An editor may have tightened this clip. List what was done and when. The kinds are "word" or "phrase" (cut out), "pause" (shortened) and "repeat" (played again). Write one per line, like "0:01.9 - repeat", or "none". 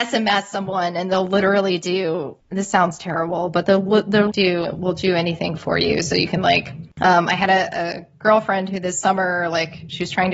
0:04.3 - word
0:06.9 - pause